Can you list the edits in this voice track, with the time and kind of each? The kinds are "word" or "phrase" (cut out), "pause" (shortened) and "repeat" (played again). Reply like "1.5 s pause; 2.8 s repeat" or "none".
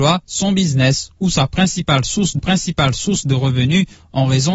2.4 s repeat